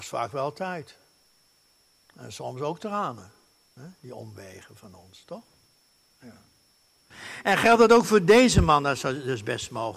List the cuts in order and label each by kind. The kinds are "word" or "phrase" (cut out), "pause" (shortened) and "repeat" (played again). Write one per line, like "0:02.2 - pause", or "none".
none